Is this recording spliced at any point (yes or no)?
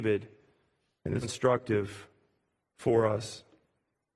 yes